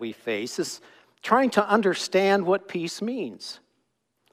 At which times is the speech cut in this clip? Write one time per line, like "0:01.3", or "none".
none